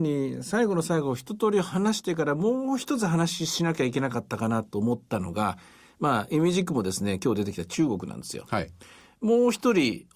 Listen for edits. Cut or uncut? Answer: uncut